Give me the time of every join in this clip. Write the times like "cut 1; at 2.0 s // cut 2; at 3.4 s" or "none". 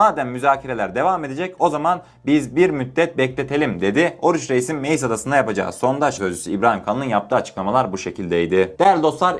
cut 1; at 6.2 s